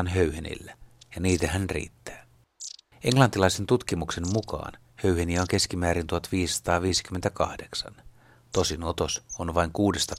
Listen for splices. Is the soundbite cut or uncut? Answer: uncut